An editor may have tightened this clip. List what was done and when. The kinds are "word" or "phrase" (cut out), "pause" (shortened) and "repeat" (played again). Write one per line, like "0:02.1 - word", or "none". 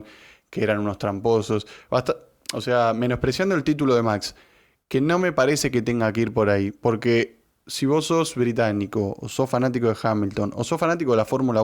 none